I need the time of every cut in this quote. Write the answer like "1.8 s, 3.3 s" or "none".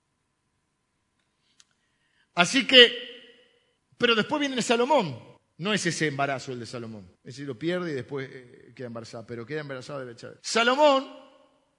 3.8 s, 5.4 s, 7.2 s, 10.4 s